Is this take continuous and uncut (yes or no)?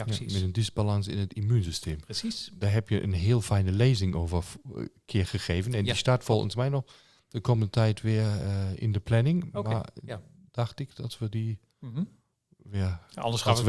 yes